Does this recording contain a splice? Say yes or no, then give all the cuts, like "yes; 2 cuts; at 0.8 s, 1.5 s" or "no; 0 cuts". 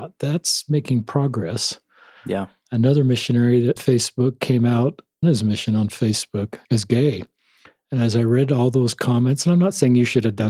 yes; 3 cuts; at 3.8 s, 5.2 s, 6.6 s